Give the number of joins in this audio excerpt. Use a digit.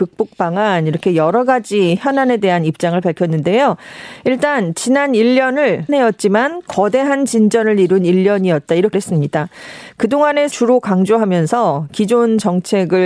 3